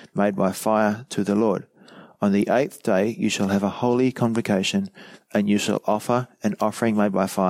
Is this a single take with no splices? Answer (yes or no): yes